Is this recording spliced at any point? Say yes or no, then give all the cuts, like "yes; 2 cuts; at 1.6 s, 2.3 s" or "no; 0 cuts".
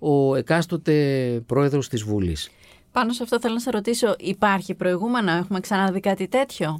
no; 0 cuts